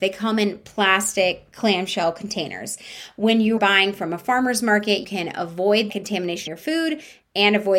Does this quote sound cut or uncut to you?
cut